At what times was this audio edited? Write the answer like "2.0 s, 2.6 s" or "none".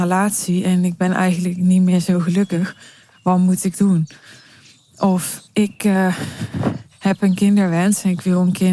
none

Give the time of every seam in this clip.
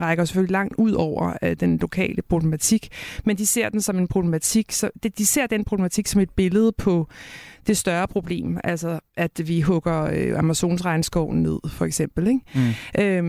none

